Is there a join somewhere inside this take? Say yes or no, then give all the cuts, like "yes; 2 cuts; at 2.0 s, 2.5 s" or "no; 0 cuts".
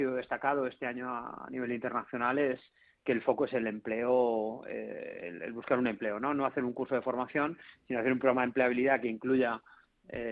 no; 0 cuts